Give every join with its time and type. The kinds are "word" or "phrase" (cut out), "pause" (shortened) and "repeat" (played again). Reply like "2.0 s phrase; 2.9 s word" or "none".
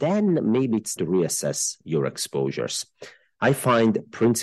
1.0 s word